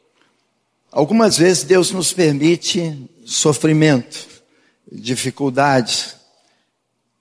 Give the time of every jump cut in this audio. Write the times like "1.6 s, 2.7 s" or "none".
none